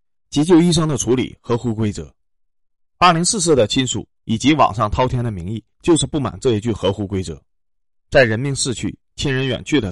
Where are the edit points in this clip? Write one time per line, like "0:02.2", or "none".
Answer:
0:05.7